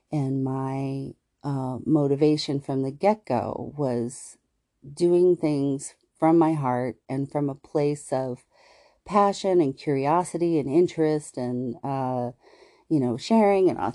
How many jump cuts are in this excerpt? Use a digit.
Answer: 0